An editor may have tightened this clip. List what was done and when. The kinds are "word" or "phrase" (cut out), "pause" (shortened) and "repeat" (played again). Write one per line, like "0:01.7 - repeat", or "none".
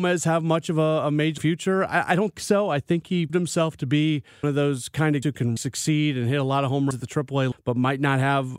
0:01.4 - word
0:02.4 - word
0:03.3 - word
0:04.4 - word
0:05.2 - word
0:05.6 - word
0:06.9 - word
0:07.5 - word